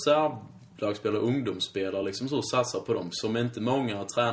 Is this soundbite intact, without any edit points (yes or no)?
yes